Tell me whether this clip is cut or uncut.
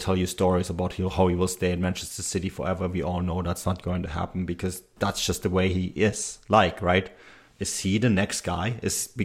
uncut